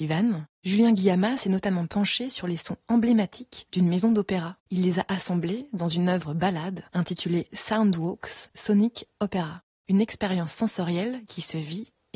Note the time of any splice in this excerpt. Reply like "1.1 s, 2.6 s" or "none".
4.6 s

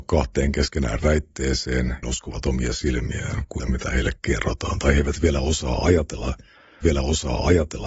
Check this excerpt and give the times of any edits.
1.0 s, 2.0 s, 3.6 s, 6.8 s

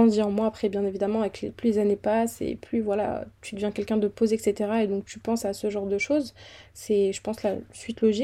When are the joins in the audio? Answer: none

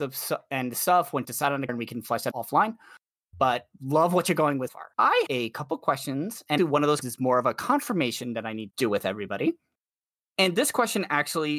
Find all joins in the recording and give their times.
1.2 s, 1.7 s, 2.3 s, 4.7 s, 5.3 s, 6.6 s, 7.0 s, 8.7 s

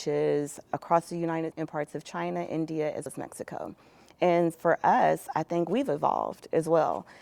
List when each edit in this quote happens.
1.5 s, 3.1 s, 4.5 s

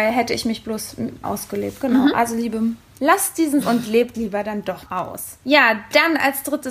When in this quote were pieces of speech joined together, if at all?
1.2 s, 3.0 s, 3.6 s, 4.1 s, 4.9 s

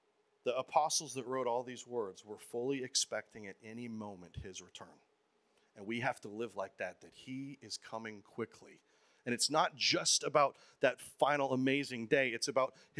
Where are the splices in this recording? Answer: none

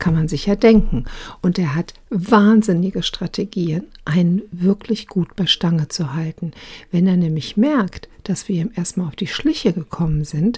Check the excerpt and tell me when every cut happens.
none

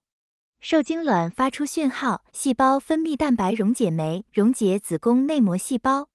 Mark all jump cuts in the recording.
2.3 s, 4.3 s

